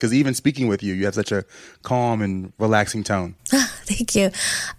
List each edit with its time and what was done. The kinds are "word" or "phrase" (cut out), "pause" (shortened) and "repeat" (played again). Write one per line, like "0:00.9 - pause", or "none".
none